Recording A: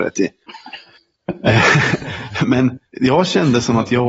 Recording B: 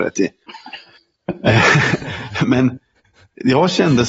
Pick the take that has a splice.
A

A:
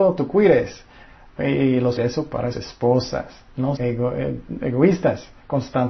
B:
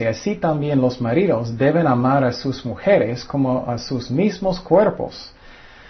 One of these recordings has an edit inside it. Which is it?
A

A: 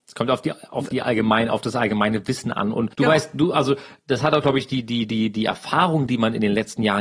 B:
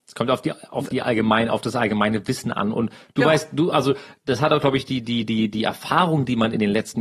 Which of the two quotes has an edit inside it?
A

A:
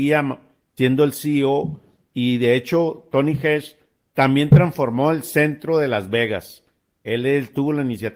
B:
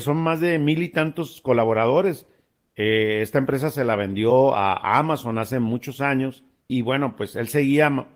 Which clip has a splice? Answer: B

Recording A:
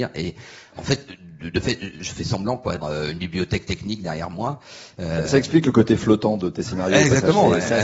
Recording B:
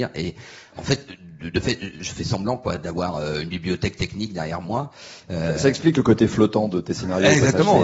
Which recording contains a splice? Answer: A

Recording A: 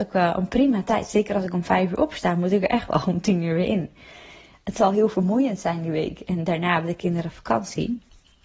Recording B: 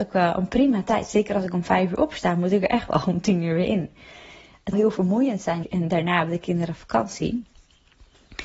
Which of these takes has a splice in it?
B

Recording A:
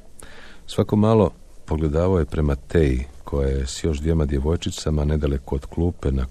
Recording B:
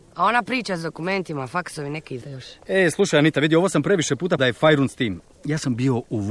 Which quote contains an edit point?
B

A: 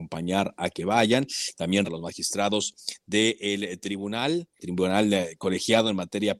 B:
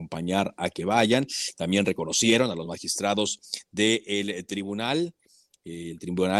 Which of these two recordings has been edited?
A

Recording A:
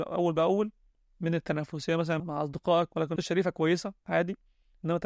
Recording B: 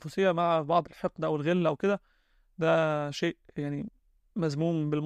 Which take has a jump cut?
A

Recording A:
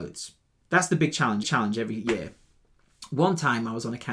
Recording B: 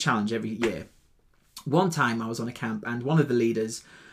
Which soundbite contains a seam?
A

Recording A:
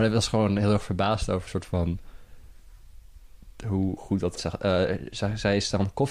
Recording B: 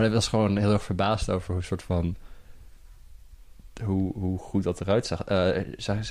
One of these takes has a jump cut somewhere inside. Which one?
A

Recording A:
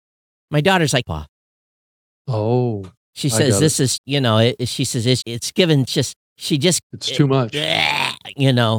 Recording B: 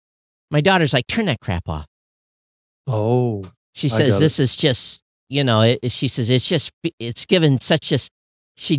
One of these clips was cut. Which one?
A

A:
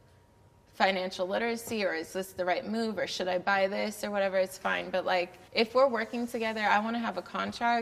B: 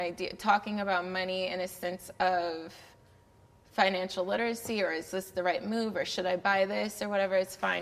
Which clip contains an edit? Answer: A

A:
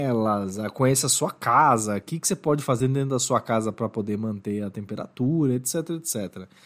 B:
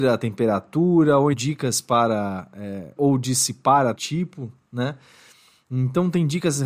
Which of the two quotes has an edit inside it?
B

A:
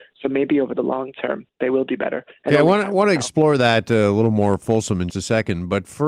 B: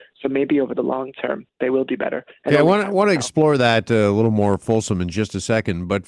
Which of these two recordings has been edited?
A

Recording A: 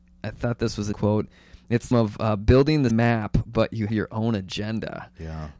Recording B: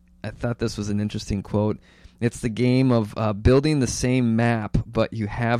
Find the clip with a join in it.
A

